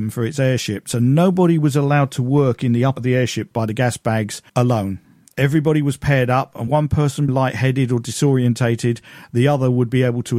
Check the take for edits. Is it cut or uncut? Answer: cut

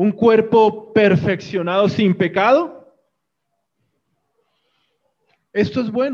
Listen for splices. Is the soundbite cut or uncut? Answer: uncut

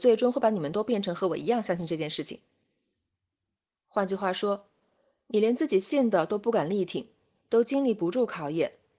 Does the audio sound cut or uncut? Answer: uncut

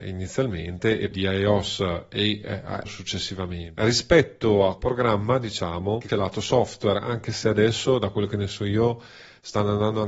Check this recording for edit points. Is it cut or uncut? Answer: cut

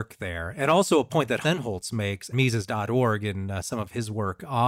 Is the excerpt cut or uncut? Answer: cut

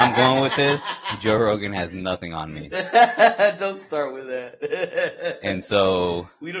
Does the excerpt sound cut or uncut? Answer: uncut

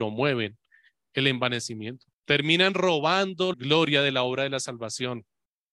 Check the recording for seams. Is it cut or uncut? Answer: cut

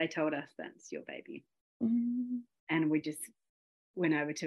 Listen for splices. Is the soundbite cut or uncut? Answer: uncut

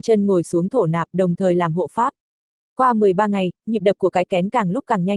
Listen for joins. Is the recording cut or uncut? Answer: uncut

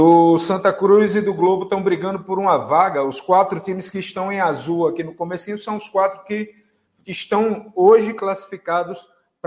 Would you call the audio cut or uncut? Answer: uncut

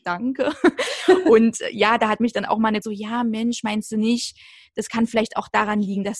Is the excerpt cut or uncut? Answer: cut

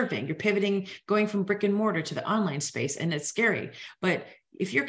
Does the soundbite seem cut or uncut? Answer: uncut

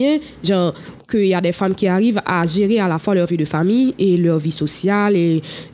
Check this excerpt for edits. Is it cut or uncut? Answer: uncut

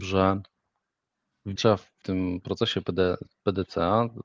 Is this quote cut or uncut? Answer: cut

